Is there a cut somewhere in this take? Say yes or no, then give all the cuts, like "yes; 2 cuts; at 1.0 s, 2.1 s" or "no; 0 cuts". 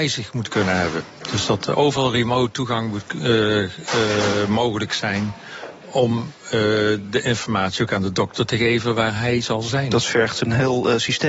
no; 0 cuts